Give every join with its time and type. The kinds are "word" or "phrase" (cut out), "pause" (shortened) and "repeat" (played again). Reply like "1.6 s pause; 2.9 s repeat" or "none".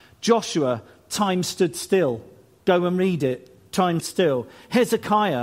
4.0 s word

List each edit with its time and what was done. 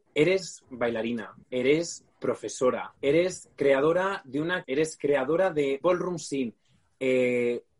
3.0 s pause; 4.6 s phrase; 5.8 s word

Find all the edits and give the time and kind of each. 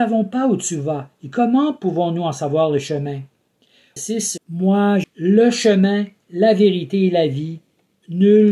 4.0 s word; 4.4 s phrase; 5.0 s word

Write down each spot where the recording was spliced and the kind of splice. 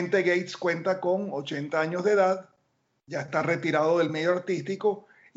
none

